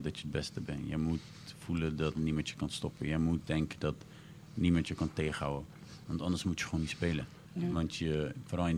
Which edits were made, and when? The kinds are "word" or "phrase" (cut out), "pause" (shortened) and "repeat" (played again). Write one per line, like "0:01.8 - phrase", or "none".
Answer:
0:06.0 - pause
0:07.4 - pause